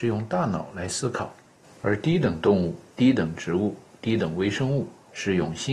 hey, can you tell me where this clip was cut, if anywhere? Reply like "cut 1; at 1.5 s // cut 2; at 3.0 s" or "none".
none